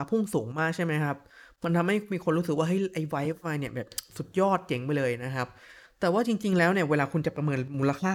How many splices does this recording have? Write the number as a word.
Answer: zero